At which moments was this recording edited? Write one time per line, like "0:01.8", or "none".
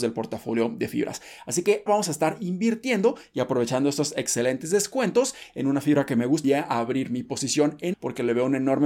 0:01.9
0:06.4
0:07.9